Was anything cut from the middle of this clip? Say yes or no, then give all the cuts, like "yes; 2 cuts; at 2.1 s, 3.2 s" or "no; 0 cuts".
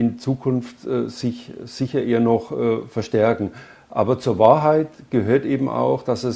no; 0 cuts